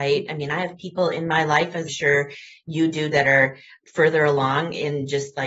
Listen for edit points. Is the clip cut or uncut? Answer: cut